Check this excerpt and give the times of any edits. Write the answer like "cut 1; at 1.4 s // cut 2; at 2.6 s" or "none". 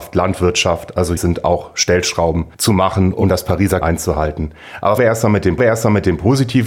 cut 1; at 1.2 s // cut 2; at 2.5 s // cut 3; at 3.8 s // cut 4; at 5.0 s // cut 5; at 5.6 s